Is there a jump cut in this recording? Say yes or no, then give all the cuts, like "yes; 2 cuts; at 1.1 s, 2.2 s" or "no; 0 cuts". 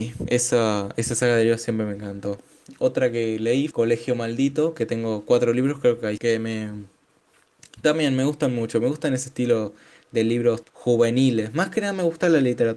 yes; 3 cuts; at 3.7 s, 6.2 s, 10.6 s